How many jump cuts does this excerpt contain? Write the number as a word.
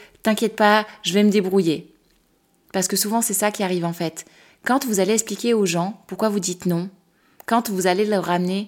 zero